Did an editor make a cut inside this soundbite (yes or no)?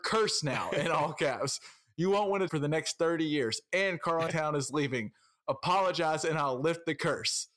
yes